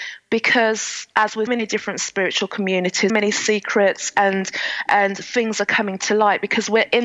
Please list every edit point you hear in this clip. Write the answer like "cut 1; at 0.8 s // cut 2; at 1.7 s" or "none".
cut 1; at 1.5 s // cut 2; at 3.1 s